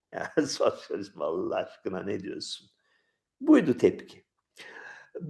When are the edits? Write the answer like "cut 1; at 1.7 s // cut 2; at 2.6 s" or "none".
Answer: none